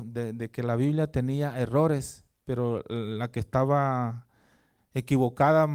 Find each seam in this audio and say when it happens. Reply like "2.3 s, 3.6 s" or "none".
none